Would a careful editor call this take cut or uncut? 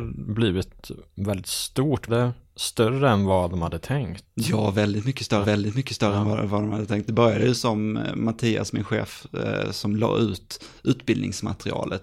cut